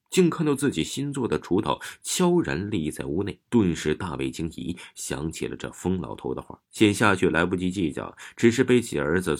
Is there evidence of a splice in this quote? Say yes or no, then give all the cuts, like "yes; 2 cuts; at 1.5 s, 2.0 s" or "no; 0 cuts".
yes; 2 cuts; at 3.5 s, 6.6 s